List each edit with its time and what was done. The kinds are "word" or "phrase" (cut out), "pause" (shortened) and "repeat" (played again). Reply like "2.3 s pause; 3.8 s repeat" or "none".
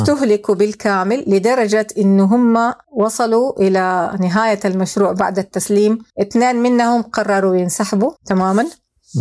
2.8 s pause; 6.1 s pause; 8.2 s pause

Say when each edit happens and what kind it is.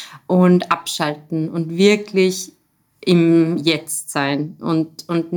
none

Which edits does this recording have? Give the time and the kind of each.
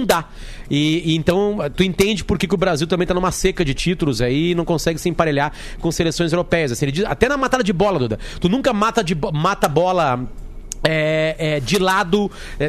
none

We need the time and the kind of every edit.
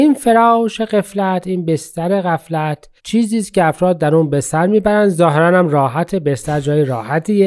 3.0 s pause

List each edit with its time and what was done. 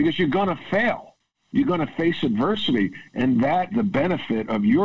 3.7 s word

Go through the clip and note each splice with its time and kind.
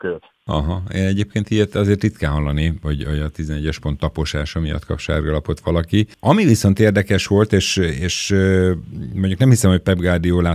none

